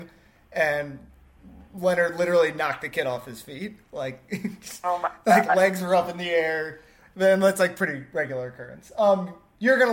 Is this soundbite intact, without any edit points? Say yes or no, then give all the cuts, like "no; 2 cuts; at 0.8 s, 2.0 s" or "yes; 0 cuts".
no; 1 cut; at 3.8 s